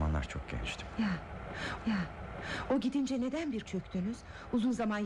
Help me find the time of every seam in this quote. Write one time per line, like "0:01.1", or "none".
0:01.8
0:03.7